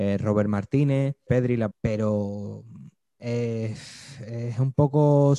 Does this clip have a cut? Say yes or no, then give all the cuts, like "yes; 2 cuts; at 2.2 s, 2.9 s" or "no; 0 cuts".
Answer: yes; 2 cuts; at 1.3 s, 1.7 s